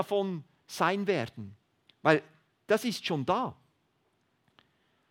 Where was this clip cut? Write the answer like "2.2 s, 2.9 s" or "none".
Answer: none

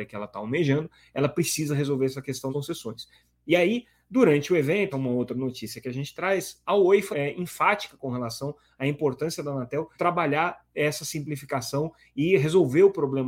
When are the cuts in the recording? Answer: 2.5 s, 4.9 s, 7.1 s, 10.0 s

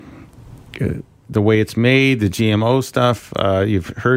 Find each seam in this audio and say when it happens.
none

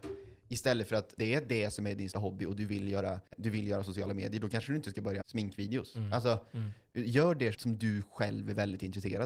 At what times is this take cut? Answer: 1.2 s, 2.1 s, 3.3 s, 5.2 s, 7.5 s

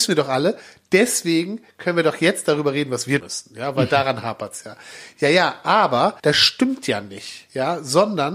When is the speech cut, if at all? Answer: 3.2 s, 6.2 s

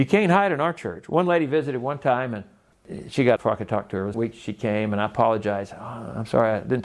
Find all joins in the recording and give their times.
3.4 s, 4.1 s

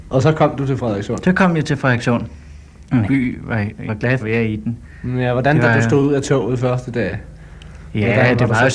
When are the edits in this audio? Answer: 3.0 s, 3.9 s, 4.2 s

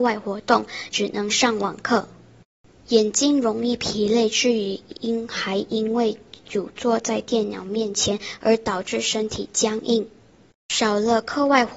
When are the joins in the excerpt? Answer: none

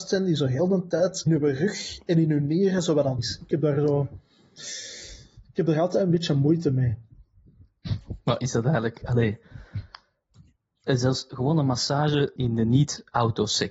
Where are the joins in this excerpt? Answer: 1.3 s, 3.2 s, 12.4 s

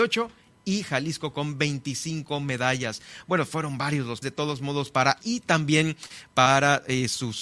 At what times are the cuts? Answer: 4.2 s, 5.2 s

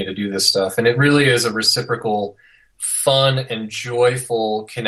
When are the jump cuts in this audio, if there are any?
none

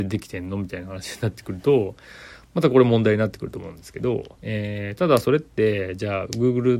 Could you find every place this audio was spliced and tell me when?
4.3 s

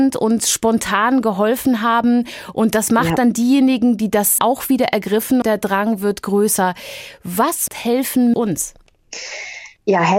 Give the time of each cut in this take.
4.4 s, 5.4 s, 7.7 s, 8.3 s

